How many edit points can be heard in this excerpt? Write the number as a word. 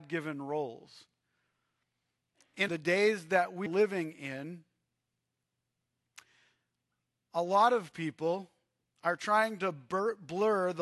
two